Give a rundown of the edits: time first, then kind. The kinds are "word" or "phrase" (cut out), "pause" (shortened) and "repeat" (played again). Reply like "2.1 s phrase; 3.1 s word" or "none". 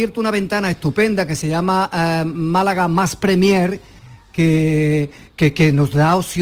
none